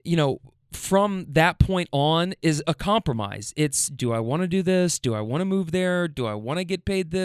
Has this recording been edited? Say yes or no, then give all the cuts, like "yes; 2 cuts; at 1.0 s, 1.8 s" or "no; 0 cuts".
no; 0 cuts